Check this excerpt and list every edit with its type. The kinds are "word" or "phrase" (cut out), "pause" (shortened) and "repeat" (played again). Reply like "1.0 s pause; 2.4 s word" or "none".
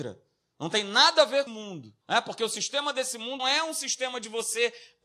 1.5 s phrase; 2.0 s pause; 3.4 s word